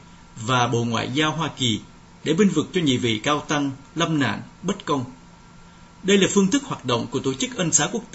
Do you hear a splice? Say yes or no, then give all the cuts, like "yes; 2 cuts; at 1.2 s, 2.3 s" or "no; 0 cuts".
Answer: no; 0 cuts